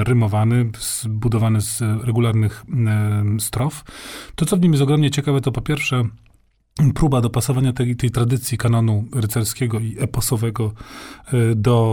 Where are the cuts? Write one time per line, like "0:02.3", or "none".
none